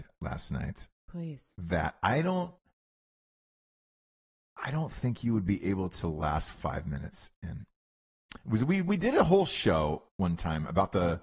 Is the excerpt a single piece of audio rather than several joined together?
yes; 0 cuts

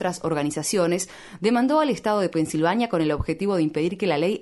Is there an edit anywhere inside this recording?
no; 0 cuts

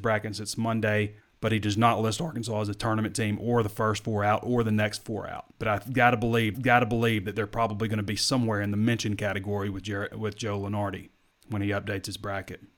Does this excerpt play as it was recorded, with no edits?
no; 5 cuts; at 1.2 s, 5.0 s, 5.5 s, 6.5 s, 11.3 s

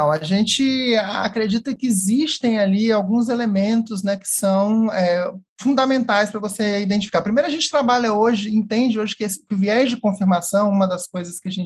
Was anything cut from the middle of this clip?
yes; 1 cut; at 5.5 s

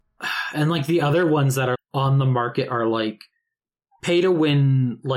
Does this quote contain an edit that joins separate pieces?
yes; 1 cut; at 1.7 s

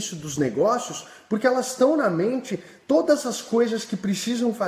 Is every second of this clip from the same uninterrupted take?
yes; 0 cuts

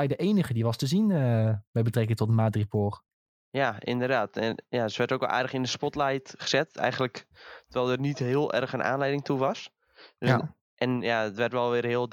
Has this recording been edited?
no; 0 cuts

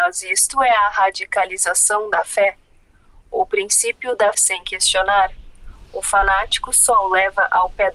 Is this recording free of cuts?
no; 1 cut; at 4.3 s

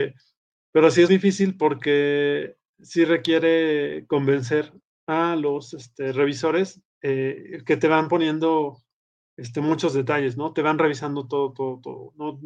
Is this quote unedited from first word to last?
no; 2 cuts; at 1.1 s, 6.9 s

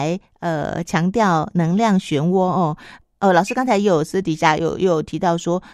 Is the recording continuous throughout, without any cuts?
yes; 0 cuts

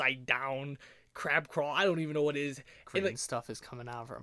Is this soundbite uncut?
yes; 0 cuts

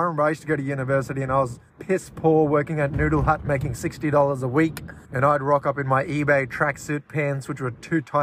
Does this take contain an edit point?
yes; 2 cuts; at 1.7 s, 5.0 s

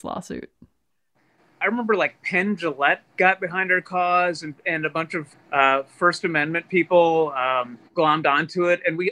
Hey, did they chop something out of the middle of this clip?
yes; 3 cuts; at 3.1 s, 5.3 s, 7.9 s

